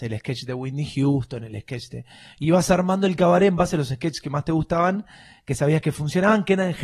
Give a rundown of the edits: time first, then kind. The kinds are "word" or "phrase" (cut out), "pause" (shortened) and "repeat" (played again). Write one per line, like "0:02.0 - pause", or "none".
none